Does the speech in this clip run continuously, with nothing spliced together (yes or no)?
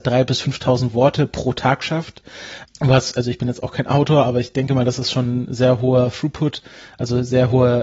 yes